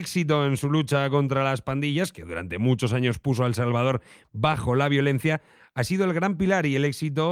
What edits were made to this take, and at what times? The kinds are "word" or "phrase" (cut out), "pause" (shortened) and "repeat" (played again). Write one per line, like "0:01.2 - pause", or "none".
none